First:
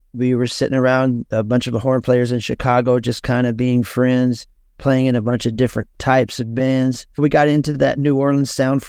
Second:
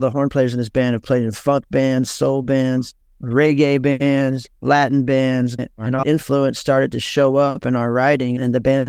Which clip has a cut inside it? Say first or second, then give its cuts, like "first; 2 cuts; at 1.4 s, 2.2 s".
second; 3 cuts; at 4.6 s, 5.6 s, 6.0 s